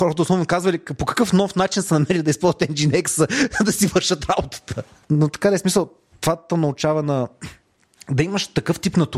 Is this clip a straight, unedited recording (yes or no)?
yes